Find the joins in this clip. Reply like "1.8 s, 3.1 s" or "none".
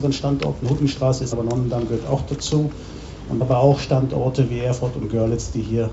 1.3 s, 3.4 s